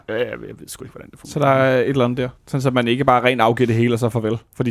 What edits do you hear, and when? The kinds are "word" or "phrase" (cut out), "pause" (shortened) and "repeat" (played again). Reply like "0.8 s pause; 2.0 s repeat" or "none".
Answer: 2.4 s pause